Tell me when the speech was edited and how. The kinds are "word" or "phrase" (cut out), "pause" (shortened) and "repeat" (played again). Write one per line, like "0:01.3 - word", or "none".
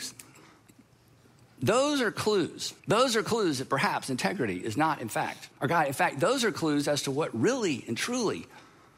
0:02.8 - pause
0:05.5 - pause

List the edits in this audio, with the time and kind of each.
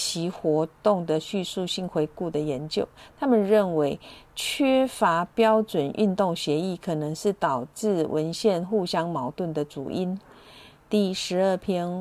none

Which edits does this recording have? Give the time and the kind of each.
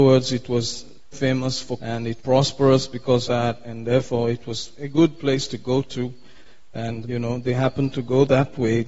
0:01.1 - word
0:01.8 - word
0:02.2 - word
0:03.3 - word
0:07.0 - word

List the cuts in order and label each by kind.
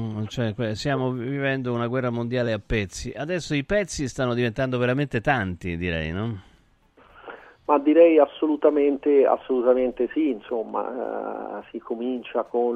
none

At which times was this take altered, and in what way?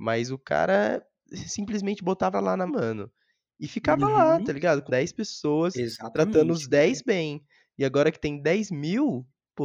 0:02.3 - phrase
0:02.7 - word
0:04.9 - phrase

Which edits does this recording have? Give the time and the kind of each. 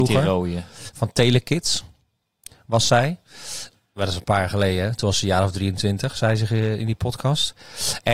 none

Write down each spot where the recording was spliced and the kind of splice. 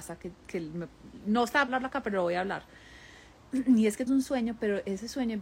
0:01.7 - word
0:04.1 - word

